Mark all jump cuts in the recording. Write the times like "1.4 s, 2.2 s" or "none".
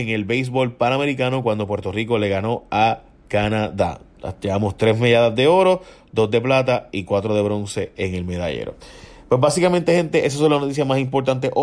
none

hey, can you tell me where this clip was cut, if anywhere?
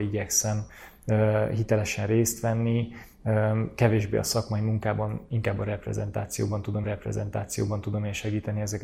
6.8 s

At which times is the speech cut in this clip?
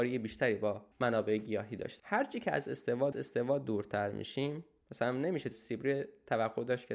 0.9 s, 2.0 s, 3.1 s, 5.5 s

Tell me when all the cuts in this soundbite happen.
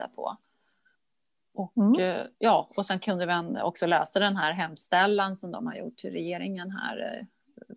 2.3 s

